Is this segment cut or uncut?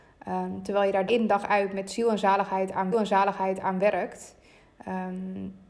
cut